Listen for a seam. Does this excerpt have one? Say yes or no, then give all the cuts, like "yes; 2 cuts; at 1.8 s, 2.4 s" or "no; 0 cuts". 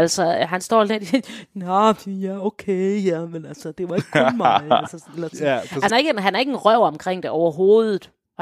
yes; 1 cut; at 5.9 s